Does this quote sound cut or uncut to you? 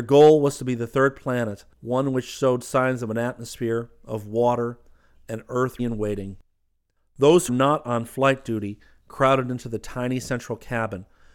cut